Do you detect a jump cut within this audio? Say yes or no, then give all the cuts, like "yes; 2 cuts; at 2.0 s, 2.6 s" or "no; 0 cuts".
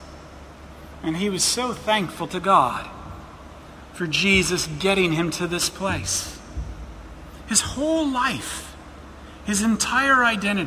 no; 0 cuts